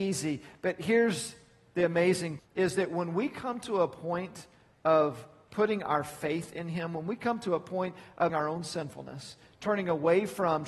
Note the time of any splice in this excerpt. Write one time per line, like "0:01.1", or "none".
0:02.4
0:08.3

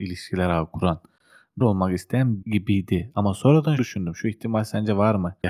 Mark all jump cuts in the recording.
0:01.6
0:02.4
0:03.8

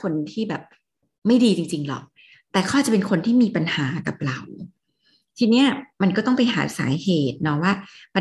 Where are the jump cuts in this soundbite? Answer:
none

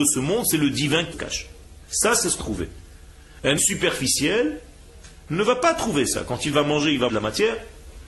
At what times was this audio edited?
0:01.1
0:01.8
0:02.4
0:03.6
0:07.1

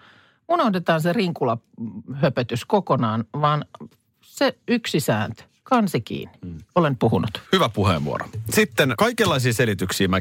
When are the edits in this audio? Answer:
0:06.7
0:07.4
0:08.9

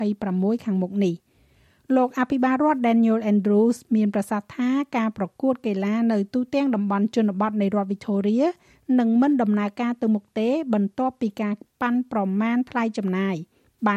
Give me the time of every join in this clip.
none

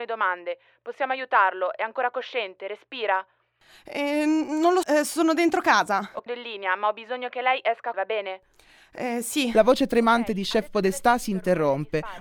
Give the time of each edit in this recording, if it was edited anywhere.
0:04.8
0:06.3
0:07.9

